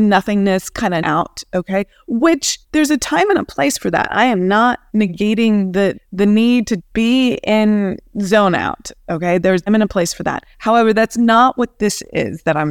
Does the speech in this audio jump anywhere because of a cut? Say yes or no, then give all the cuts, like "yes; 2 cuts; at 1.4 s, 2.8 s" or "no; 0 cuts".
yes; 8 cuts; at 1.0 s, 2.6 s, 4.9 s, 5.9 s, 6.8 s, 8.1 s, 9.7 s, 10.5 s